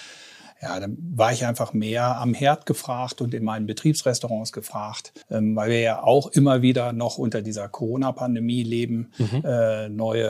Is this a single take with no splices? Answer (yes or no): no